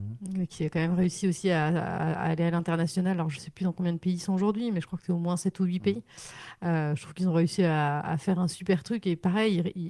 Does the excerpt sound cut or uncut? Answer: uncut